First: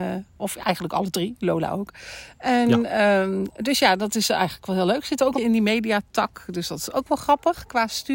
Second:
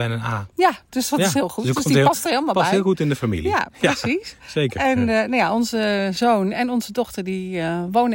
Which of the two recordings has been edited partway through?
first; 1 cut; at 5.4 s

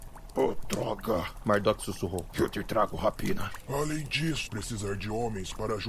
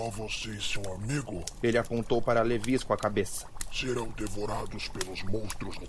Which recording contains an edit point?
first; 2 cuts; at 2.5 s, 4.5 s

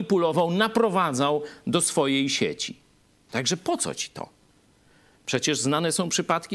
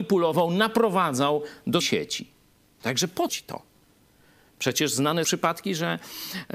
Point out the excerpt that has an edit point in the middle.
second; 3 cuts; at 1.8 s, 3.3 s, 5.2 s

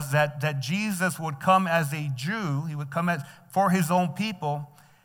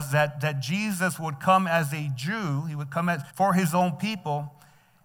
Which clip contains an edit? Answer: second; 1 cut; at 3.3 s

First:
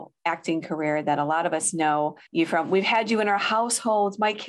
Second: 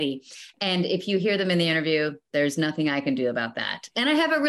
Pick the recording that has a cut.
first; 1 cut; at 2.3 s

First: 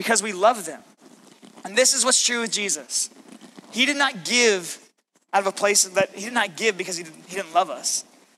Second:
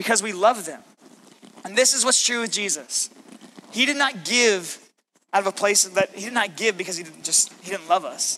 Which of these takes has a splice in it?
first; 1 cut; at 7.2 s

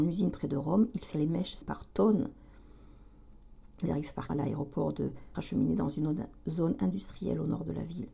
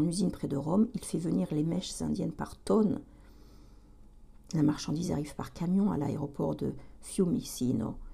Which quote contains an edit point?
first; 5 cuts; at 1.1 s, 1.6 s, 3.9 s, 4.3 s, 5.3 s

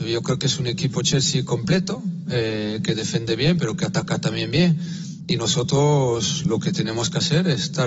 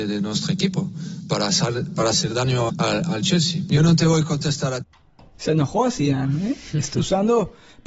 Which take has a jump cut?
second; 2 cuts; at 2.7 s, 5.2 s

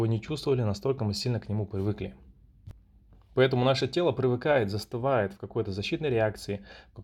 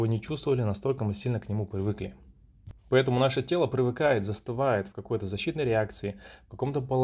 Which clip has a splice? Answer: second; 1 cut; at 2.8 s

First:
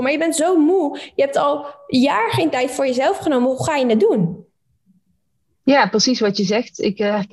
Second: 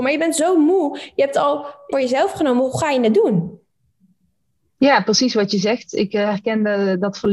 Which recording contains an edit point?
second; 1 cut; at 1.9 s

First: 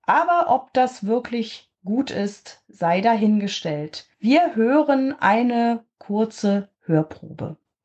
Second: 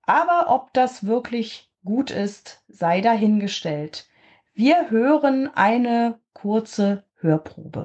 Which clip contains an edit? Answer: first; 1 cut; at 4.1 s

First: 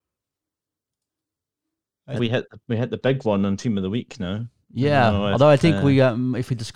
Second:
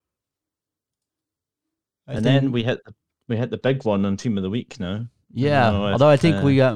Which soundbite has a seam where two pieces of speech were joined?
first; 2 cuts; at 2.2 s, 2.6 s

